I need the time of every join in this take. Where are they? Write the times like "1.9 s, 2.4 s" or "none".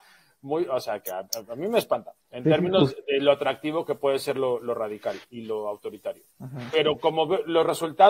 2.2 s, 6.3 s